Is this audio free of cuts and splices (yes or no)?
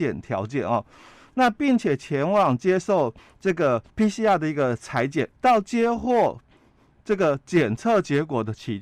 no